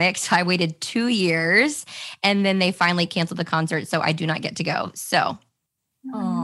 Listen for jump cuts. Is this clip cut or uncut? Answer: uncut